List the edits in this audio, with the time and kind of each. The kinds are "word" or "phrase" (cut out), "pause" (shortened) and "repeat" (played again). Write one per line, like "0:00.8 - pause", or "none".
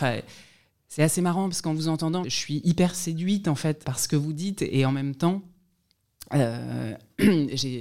0:02.2 - word
0:03.8 - word